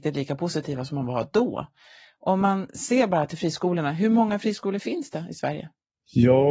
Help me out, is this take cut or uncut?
uncut